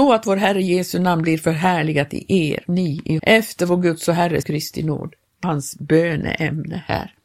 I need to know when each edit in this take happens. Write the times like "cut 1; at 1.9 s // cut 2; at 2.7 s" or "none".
cut 1; at 2.7 s // cut 2; at 3.2 s // cut 3; at 4.4 s // cut 4; at 5.4 s

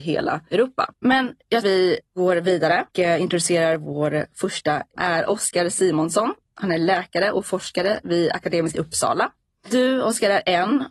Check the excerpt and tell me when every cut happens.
cut 1; at 0.9 s // cut 2; at 1.6 s // cut 3; at 2.9 s // cut 4; at 5.0 s // cut 5; at 6.4 s // cut 6; at 8.7 s

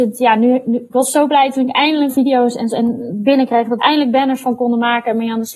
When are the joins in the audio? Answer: cut 1; at 2.1 s // cut 2; at 2.7 s // cut 3; at 3.8 s

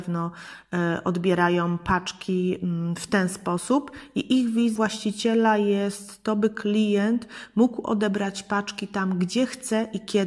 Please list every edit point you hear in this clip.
cut 1; at 4.8 s

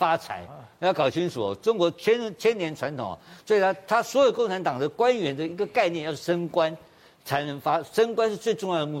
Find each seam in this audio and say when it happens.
none

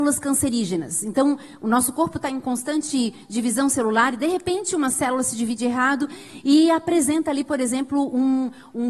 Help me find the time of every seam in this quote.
none

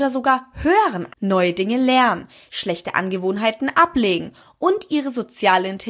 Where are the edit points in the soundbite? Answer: cut 1; at 1.1 s

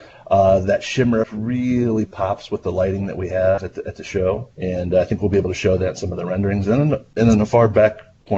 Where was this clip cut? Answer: cut 1; at 1.2 s // cut 2; at 4.5 s

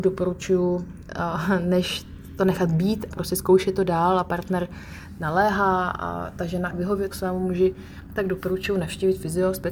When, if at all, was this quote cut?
cut 1; at 3.1 s // cut 2; at 6.7 s // cut 3; at 7.1 s

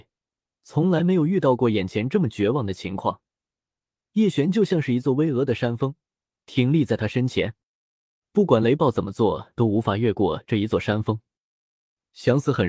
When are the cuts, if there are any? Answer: none

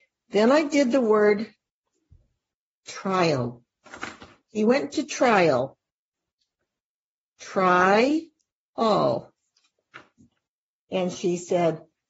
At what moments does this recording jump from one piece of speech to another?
none

